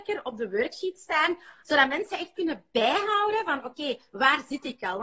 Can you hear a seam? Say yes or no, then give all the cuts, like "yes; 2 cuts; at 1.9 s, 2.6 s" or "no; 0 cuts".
no; 0 cuts